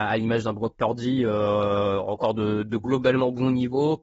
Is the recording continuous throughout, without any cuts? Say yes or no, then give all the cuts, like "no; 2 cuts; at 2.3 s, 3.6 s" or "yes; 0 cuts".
yes; 0 cuts